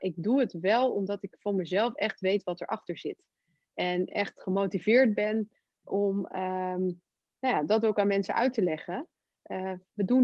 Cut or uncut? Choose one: uncut